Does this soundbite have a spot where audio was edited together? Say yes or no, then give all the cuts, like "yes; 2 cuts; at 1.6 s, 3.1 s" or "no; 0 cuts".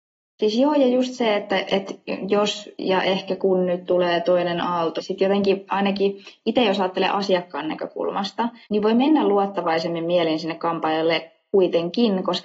yes; 2 cuts; at 5.0 s, 8.6 s